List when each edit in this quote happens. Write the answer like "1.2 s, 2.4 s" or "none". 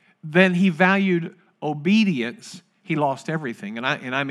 none